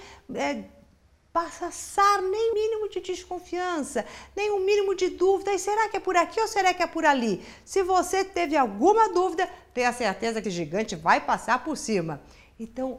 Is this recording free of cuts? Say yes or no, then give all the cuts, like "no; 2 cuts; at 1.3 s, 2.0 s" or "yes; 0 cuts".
no; 2 cuts; at 2.5 s, 10.4 s